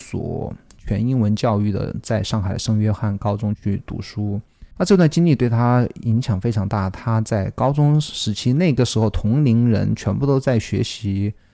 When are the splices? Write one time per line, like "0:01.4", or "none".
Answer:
0:04.7